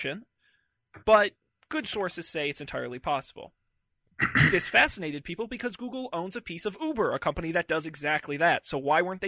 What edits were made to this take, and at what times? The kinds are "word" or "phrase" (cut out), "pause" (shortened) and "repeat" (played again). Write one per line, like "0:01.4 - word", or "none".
none